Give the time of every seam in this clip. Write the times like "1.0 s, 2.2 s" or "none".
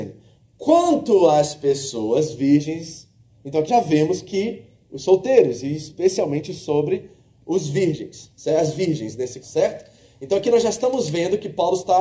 3.7 s, 4.9 s, 9.4 s

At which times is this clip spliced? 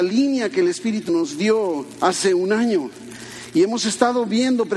1.1 s

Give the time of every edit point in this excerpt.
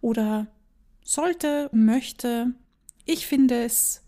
1.7 s

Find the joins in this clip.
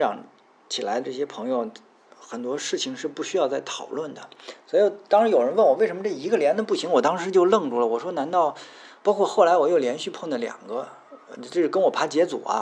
9.0 s

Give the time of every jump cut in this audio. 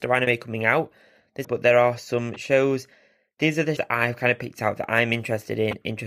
1.4 s, 3.8 s

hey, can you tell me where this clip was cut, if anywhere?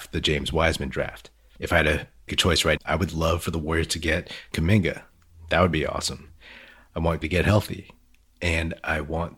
2.3 s, 2.8 s, 4.5 s, 7.2 s

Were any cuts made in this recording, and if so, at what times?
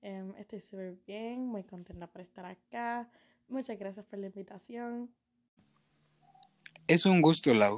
none

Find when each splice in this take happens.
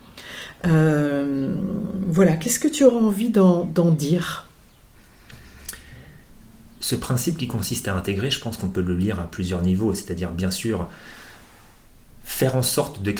none

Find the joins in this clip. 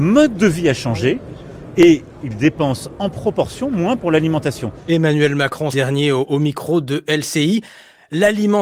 5.7 s

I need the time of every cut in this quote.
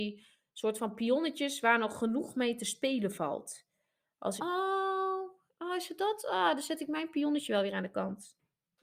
4.4 s

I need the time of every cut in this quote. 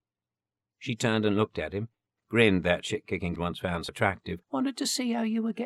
3.4 s, 3.9 s, 4.4 s

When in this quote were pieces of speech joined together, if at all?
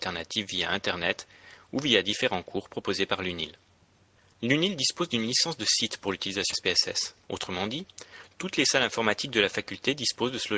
3.8 s, 6.5 s, 7.2 s

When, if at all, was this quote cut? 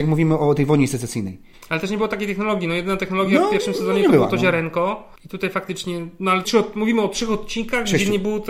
1.5 s, 5.2 s, 6.4 s

